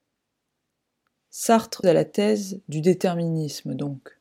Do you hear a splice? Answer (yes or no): yes